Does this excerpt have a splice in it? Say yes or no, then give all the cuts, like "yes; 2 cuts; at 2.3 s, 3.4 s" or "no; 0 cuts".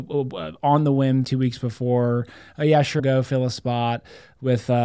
yes; 2 cuts; at 1.2 s, 3.0 s